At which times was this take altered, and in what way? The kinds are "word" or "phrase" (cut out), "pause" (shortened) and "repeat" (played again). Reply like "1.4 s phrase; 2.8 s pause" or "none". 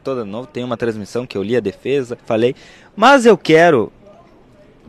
2.2 s pause